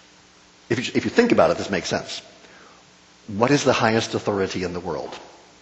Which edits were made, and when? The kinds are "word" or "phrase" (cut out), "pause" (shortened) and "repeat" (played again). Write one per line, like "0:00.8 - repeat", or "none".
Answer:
none

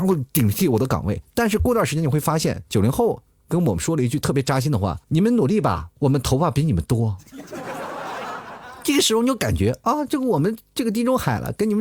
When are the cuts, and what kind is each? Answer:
0:05.0 - pause

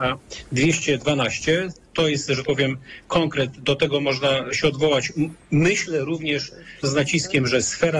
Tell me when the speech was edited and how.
0:02.4 - word
0:06.8 - phrase

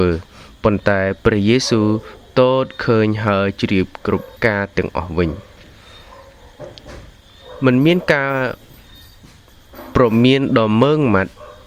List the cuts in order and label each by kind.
0:04.4 - pause

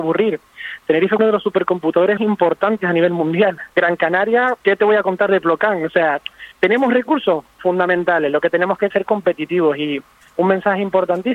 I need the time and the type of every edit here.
0:01.2 - phrase
0:02.2 - word
0:03.7 - pause
0:04.6 - pause
0:06.5 - pause
0:07.6 - word
0:08.9 - phrase

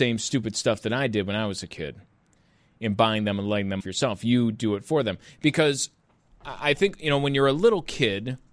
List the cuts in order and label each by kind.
0:03.8 - word

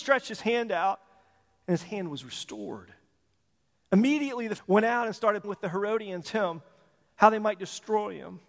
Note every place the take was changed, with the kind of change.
0:04.6 - word
0:05.4 - word
0:06.2 - word

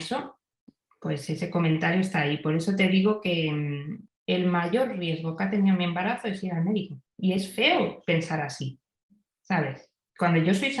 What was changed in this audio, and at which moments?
0:07.1 - pause

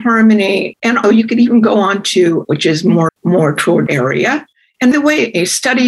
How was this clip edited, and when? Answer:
0:01.0 - word
0:02.4 - word
0:03.1 - word
0:03.9 - word
0:04.9 - word

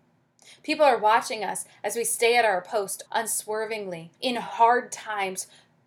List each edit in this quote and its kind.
0:03.1 - word
0:04.1 - pause

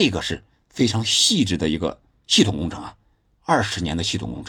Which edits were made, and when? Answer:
none

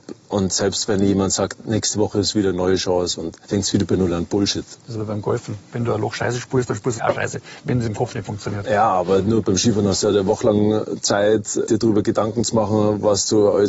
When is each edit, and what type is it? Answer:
0:01.5 - phrase
0:03.4 - pause
0:04.8 - pause
0:07.0 - phrase
0:11.7 - word

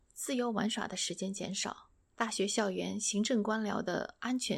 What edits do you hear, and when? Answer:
0:02.0 - phrase

